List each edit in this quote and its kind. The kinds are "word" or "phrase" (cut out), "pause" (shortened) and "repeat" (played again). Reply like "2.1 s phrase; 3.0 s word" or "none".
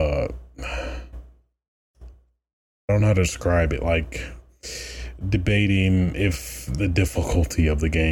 none